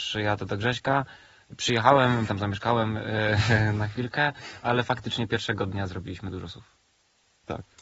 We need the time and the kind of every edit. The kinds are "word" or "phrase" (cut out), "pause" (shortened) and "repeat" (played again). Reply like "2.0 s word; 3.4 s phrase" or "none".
2.3 s word; 3.7 s word